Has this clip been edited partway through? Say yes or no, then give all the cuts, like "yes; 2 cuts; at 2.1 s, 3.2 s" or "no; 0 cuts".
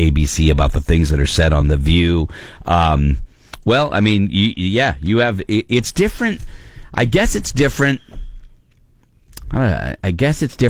no; 0 cuts